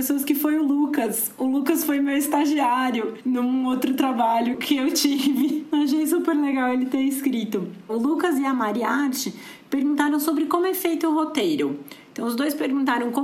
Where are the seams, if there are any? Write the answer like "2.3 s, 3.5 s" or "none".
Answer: none